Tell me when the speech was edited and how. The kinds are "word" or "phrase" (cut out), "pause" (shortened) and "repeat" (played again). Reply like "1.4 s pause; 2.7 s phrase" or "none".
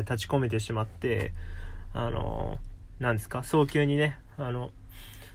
4.3 s pause